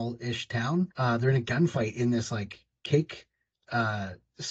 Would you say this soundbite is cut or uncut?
cut